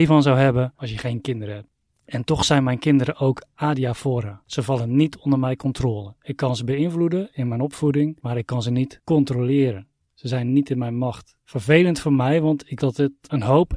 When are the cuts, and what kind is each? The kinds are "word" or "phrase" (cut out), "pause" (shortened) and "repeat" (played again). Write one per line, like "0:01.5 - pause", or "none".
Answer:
0:12.8 - word